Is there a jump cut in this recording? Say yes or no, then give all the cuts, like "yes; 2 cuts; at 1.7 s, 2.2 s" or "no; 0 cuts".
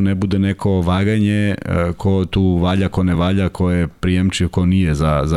no; 0 cuts